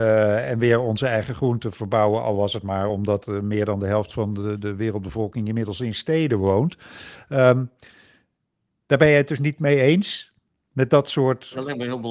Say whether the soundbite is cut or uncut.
uncut